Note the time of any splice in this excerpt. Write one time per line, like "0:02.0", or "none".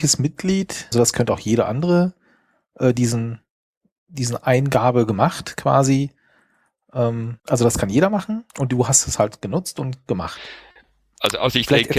0:00.9
0:07.4
0:08.5

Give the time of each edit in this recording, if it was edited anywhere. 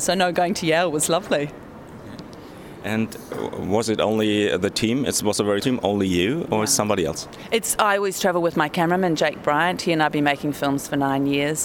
0:05.6

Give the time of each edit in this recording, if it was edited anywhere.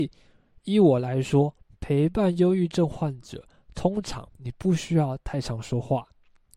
0:04.3

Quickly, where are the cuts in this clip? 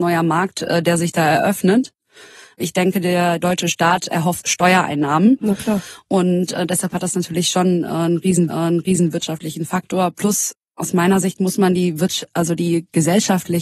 0:04.4
0:08.5

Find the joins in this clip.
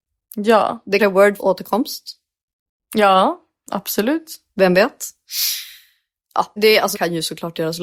0:01.0
0:01.4
0:06.6
0:06.9

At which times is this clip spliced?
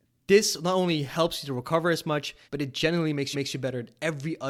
0:02.5
0:03.3

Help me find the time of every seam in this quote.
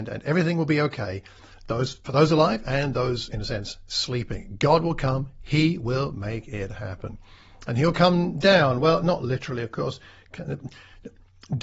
none

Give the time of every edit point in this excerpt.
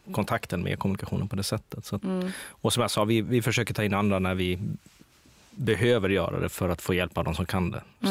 none

